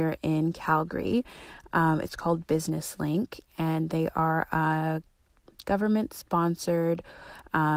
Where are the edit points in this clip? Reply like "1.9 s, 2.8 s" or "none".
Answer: none

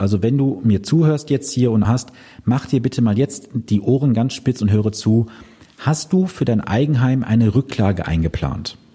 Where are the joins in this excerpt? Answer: 1.8 s

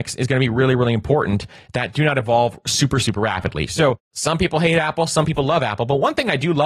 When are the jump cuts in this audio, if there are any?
none

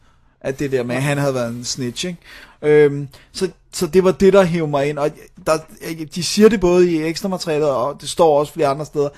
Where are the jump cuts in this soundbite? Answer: none

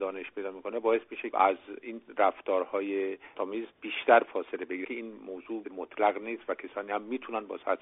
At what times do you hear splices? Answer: 1.3 s, 3.3 s, 4.8 s, 5.7 s

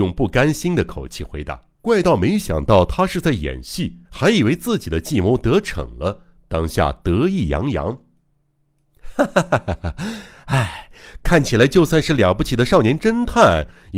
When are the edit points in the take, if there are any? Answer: 1.7 s, 4.0 s

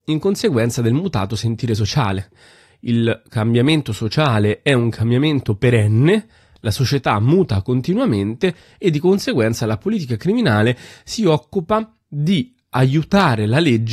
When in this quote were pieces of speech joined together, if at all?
none

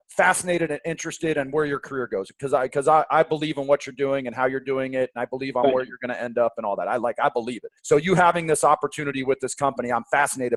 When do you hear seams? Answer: 7.8 s

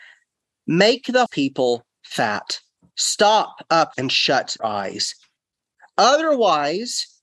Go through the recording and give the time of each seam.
1.3 s, 2.8 s, 3.9 s, 4.6 s

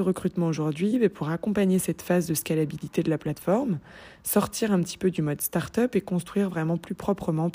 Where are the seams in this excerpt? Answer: none

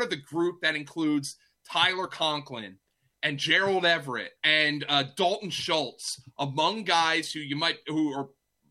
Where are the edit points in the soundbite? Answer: 4.4 s

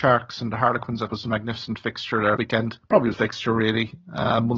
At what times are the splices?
1.1 s, 2.4 s, 2.8 s, 3.1 s

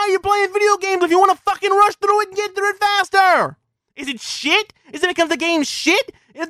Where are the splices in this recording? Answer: none

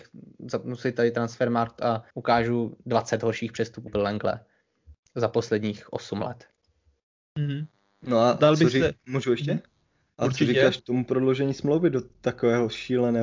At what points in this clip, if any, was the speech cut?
2.1 s, 3.9 s, 10.8 s

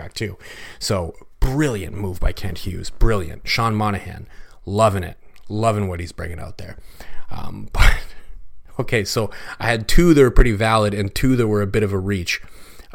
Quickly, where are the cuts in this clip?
none

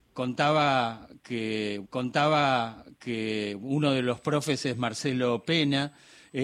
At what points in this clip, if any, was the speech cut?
1.8 s

